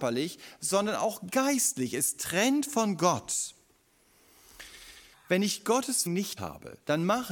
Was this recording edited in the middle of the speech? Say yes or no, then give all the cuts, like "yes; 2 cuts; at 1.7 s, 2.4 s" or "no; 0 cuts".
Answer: yes; 3 cuts; at 5.1 s, 6.1 s, 6.4 s